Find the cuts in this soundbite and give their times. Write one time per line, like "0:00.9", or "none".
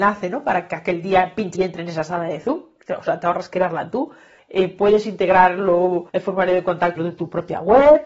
0:01.5
0:04.4
0:06.1
0:07.0